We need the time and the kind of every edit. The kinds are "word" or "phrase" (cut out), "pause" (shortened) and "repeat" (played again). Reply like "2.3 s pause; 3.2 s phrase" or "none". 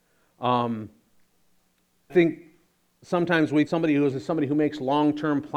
2.1 s word; 3.7 s word; 4.1 s word